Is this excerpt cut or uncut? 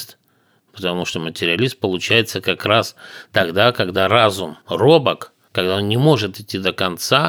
uncut